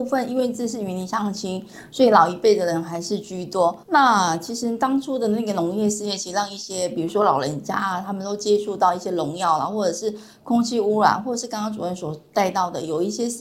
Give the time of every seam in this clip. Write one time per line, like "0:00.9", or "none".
0:03.8